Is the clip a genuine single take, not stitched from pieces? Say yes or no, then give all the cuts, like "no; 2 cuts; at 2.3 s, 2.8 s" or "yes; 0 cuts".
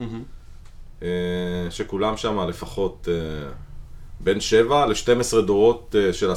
yes; 0 cuts